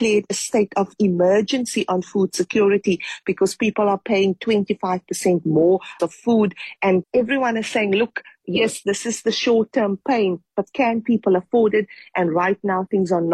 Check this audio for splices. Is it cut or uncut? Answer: cut